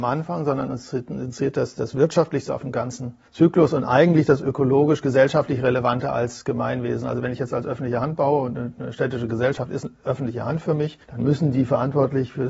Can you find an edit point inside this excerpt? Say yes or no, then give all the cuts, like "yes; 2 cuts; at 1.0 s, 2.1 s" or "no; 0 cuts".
yes; 2 cuts; at 3.3 s, 11.0 s